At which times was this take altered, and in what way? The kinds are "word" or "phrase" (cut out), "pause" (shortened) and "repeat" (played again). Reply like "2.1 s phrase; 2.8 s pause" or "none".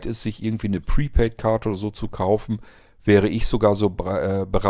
none

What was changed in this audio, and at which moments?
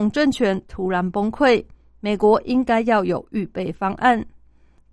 none

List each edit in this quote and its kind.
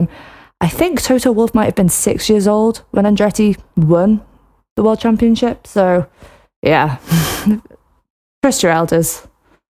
none

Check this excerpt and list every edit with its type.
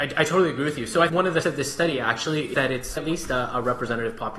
1.1 s word; 1.4 s word; 2.5 s word; 3.0 s word

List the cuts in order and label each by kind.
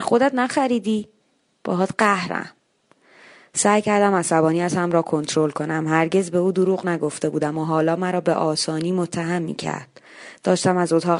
none

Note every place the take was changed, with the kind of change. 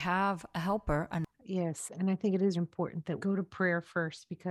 2.5 s word; 3.2 s word

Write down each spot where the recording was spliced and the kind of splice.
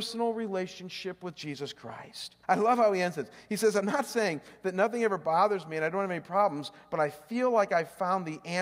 2.4 s pause

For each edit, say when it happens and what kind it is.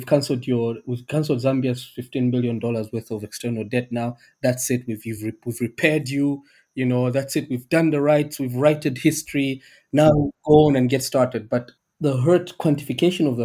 none

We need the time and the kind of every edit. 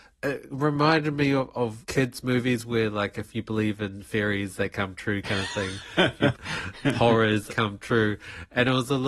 6.3 s phrase; 7.5 s word

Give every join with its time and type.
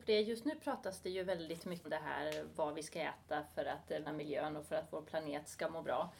1.8 s word; 4.1 s word

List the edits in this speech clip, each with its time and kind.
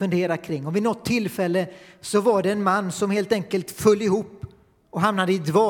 none

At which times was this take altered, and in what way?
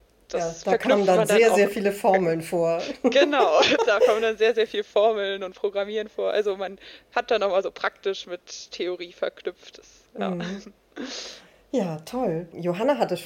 none

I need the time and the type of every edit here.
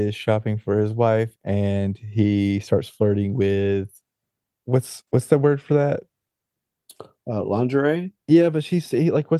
5.1 s pause; 8.2 s pause

